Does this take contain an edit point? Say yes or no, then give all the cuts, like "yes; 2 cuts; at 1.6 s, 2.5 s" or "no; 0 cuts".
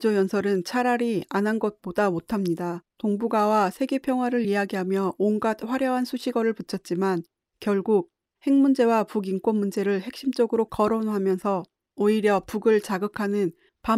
no; 0 cuts